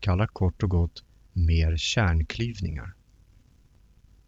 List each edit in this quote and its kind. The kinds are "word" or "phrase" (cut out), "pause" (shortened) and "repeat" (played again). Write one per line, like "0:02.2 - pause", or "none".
none